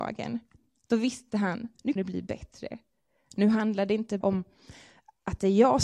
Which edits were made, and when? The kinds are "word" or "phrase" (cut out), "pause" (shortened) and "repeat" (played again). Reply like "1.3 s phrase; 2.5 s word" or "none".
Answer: 2.0 s word; 4.2 s word